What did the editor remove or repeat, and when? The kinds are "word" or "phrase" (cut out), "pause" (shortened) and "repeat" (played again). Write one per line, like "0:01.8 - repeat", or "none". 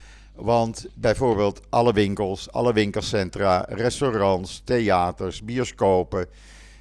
none